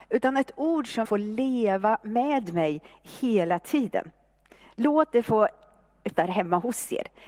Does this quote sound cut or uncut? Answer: cut